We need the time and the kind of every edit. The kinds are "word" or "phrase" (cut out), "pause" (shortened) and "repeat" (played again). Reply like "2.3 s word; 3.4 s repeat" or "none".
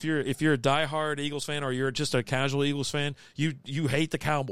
none